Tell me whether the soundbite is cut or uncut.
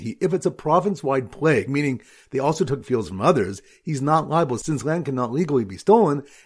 uncut